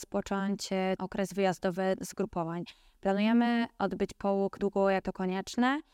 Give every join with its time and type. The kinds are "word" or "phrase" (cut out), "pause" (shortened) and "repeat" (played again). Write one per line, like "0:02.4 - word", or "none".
0:01.0 - word
0:04.6 - word
0:05.0 - word

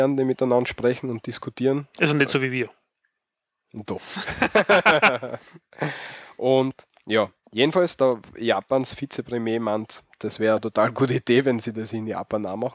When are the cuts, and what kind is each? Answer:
none

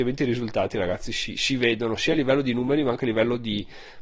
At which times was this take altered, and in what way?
none

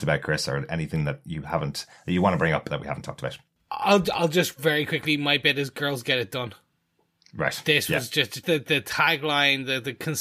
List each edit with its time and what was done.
0:08.4 - word

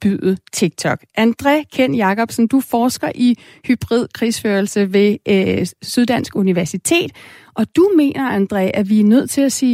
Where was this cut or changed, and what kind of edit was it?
none

